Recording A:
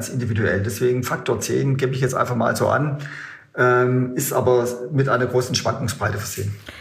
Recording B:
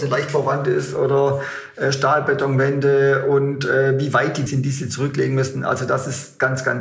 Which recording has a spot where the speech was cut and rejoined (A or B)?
B